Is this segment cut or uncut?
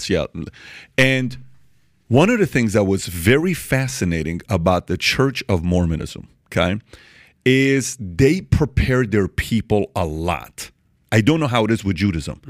uncut